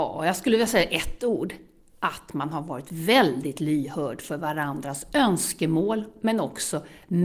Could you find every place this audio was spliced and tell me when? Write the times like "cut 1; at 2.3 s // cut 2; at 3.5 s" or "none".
none